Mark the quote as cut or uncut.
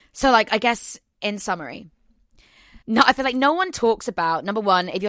cut